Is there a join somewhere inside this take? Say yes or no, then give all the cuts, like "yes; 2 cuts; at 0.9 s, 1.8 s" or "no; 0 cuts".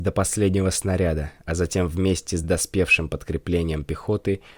no; 0 cuts